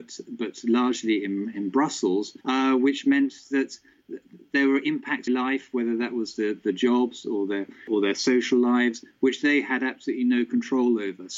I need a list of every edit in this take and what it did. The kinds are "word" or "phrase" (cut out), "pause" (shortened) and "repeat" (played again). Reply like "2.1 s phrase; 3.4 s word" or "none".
2.4 s pause; 5.3 s phrase